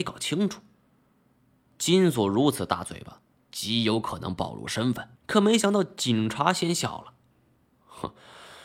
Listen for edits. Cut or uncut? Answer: cut